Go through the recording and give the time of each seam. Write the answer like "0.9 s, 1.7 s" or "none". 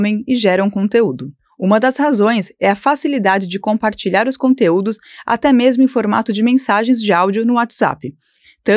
none